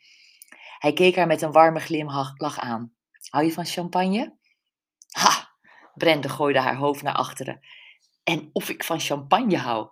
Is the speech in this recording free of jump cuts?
yes; 0 cuts

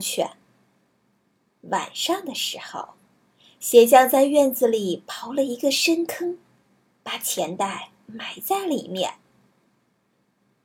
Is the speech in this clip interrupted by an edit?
no; 0 cuts

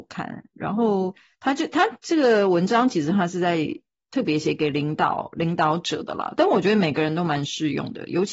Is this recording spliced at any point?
no; 0 cuts

